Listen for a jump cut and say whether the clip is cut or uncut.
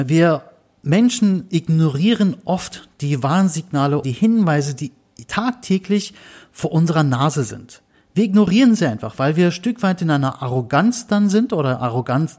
cut